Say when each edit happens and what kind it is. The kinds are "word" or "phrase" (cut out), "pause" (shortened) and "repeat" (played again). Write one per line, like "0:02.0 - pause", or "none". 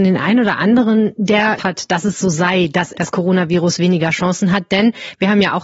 0:01.6 - word
0:02.9 - phrase